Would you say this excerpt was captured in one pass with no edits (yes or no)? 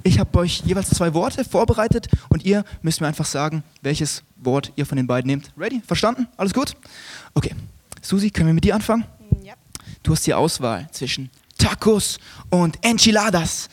yes